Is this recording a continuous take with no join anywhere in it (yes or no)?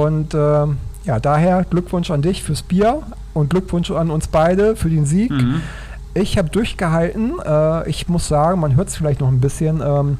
yes